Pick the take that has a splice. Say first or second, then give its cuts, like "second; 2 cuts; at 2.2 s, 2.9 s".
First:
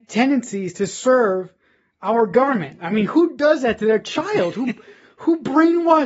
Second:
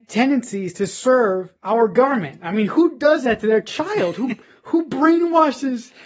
second; 2 cuts; at 1.6 s, 4.4 s